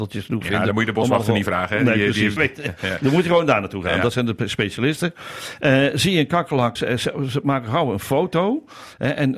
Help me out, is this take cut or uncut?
cut